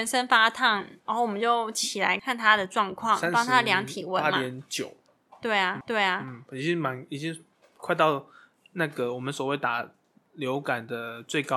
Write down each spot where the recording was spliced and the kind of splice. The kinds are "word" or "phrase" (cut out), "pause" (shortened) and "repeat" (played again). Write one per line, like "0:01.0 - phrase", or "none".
0:01.0 - pause
0:05.8 - repeat